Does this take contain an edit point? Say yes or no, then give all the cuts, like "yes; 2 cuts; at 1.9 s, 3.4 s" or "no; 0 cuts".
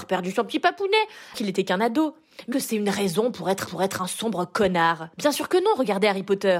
yes; 4 cuts; at 1.3 s, 2.5 s, 3.7 s, 5.1 s